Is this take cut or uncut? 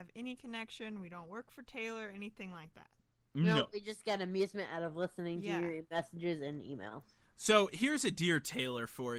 uncut